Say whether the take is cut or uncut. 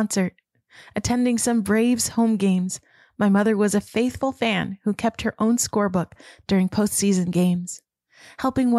uncut